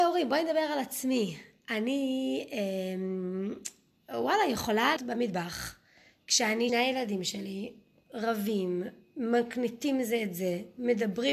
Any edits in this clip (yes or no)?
yes